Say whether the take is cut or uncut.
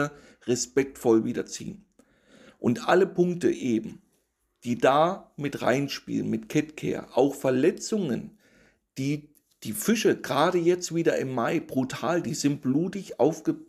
uncut